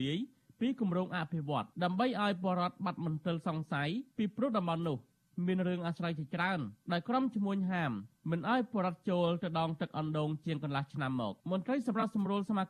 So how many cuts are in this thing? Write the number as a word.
two